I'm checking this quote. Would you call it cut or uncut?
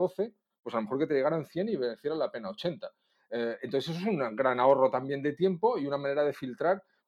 uncut